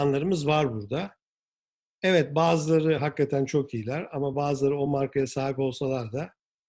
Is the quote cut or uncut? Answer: uncut